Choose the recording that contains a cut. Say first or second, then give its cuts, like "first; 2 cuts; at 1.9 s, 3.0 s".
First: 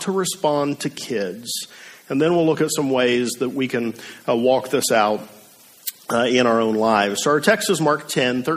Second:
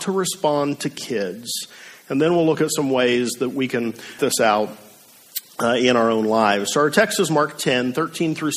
second; 1 cut; at 4.2 s